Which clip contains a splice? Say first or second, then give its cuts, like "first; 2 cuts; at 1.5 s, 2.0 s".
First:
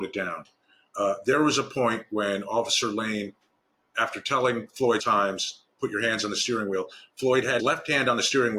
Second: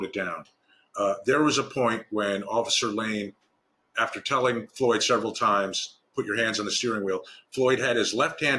first; 2 cuts; at 5.0 s, 7.6 s